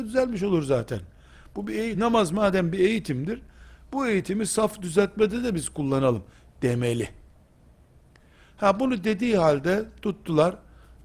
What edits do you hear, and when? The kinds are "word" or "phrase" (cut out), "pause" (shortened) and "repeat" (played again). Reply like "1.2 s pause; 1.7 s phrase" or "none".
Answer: none